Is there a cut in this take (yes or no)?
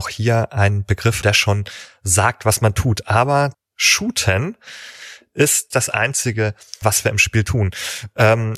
yes